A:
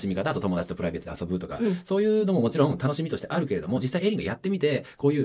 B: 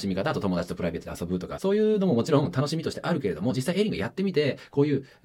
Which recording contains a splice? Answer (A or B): B